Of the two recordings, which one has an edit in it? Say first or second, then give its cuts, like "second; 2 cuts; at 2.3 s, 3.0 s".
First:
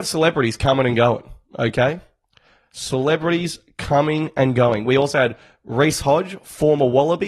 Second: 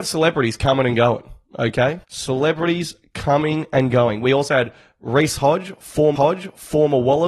second; 2 cuts; at 2.0 s, 6.2 s